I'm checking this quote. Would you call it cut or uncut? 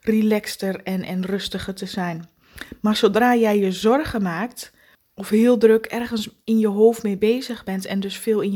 uncut